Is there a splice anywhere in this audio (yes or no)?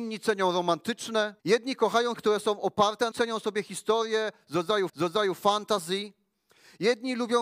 yes